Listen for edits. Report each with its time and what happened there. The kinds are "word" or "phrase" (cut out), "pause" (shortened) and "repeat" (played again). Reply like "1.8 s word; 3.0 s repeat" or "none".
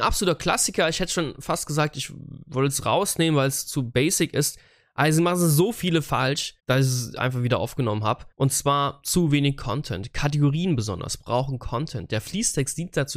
6.6 s pause; 8.3 s pause